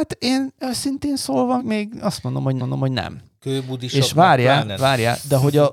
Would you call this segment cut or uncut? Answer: cut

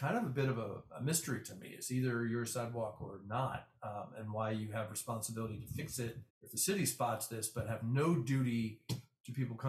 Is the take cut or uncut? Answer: cut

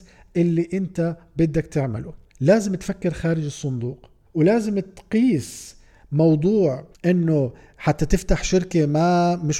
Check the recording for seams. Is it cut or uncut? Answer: cut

